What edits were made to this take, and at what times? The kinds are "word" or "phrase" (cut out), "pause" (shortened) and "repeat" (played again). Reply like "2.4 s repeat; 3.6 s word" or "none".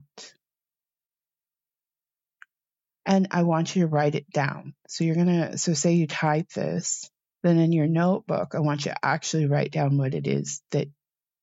7.3 s pause